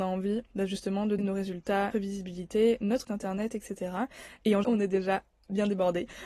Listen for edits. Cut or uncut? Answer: cut